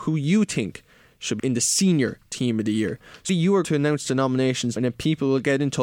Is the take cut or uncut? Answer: cut